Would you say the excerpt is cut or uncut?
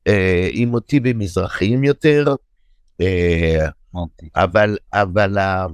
uncut